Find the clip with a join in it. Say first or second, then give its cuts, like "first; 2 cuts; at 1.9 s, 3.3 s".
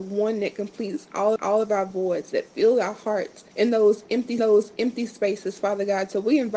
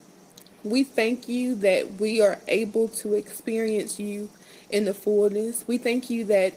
first; 3 cuts; at 1.4 s, 3.5 s, 4.4 s